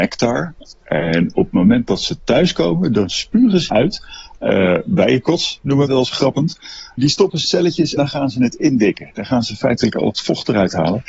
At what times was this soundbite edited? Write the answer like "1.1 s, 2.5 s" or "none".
3.7 s, 5.9 s, 7.4 s, 8.0 s